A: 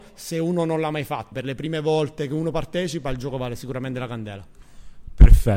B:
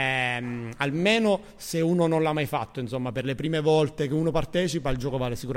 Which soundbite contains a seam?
A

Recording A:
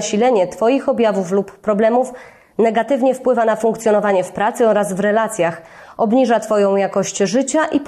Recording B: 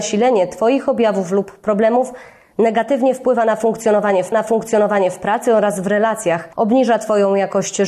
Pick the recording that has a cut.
B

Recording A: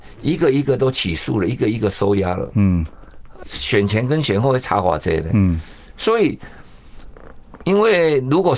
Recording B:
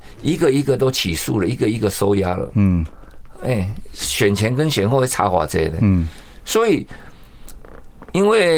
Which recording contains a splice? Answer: A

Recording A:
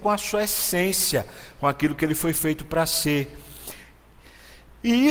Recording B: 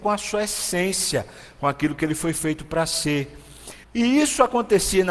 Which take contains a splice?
B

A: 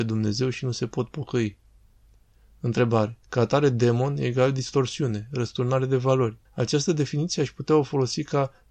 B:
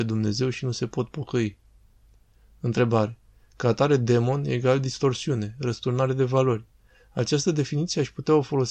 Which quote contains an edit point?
A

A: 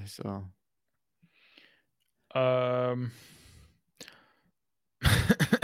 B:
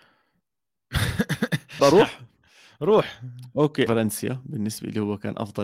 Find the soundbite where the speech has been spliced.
B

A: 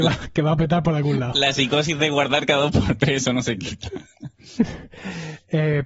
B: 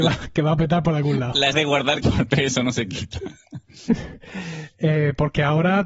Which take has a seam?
B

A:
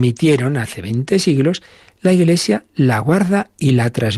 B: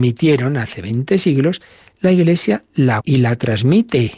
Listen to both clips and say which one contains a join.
B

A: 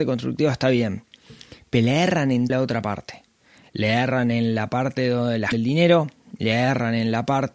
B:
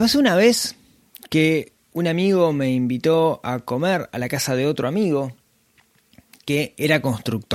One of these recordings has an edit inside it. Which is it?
A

